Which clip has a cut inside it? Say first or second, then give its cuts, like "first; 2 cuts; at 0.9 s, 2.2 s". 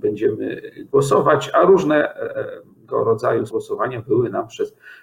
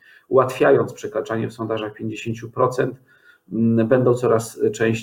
first; 1 cut; at 3.5 s